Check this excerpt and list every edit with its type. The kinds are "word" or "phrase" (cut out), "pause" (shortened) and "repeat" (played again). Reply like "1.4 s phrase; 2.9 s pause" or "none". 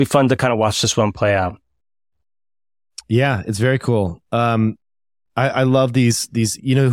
none

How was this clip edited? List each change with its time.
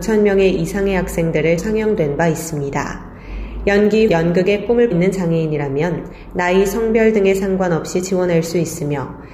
1.6 s word; 4.1 s word; 4.9 s word

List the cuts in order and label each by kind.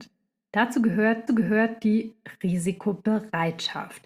1.3 s repeat

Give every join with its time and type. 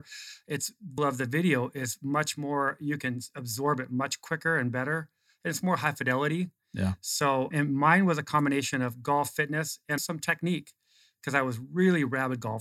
1.0 s word; 7.5 s word; 10.0 s word

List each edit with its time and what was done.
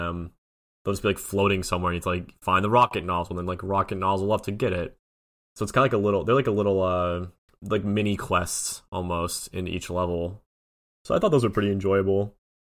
7.4 s pause

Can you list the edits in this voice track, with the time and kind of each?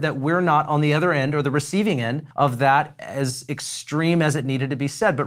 2.3 s pause

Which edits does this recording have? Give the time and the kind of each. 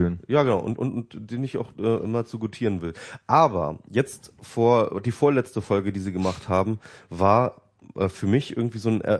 none

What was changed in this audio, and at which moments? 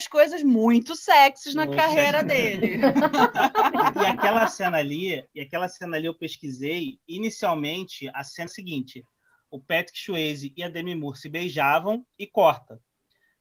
8.5 s word; 12.1 s pause

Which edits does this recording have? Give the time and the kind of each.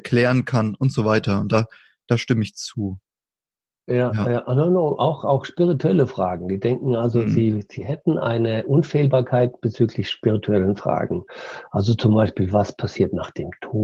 none

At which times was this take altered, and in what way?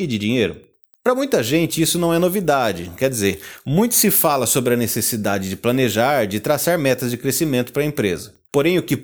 none

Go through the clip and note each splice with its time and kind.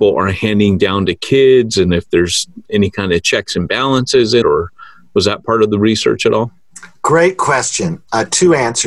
4.4 s word

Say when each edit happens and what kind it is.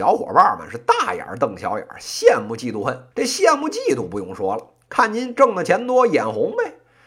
3.1 s pause

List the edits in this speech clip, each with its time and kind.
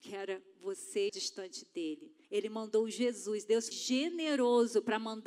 1.1 s word; 2.2 s pause; 3.7 s word

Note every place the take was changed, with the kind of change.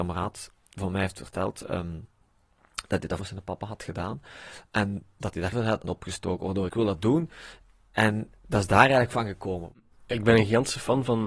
3.2 s word; 5.5 s word; 5.8 s word; 6.7 s phrase; 8.4 s word; 9.9 s pause

